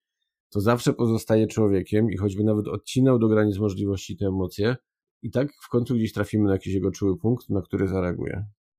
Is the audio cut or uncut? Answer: uncut